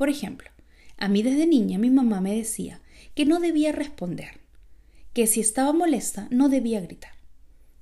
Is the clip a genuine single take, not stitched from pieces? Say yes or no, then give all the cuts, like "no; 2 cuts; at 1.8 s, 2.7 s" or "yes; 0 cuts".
yes; 0 cuts